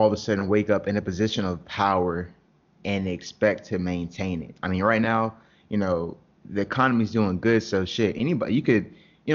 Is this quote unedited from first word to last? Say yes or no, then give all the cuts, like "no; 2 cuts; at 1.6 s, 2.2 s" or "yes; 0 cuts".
yes; 0 cuts